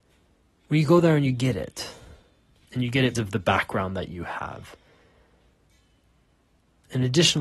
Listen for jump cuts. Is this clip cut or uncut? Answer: cut